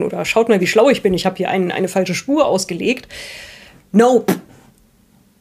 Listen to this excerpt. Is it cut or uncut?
uncut